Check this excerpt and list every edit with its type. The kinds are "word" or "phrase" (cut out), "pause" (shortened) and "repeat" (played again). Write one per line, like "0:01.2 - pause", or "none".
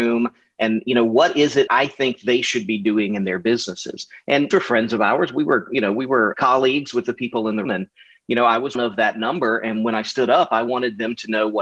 0:01.7 - word
0:04.5 - word
0:06.3 - word
0:07.6 - word
0:08.7 - word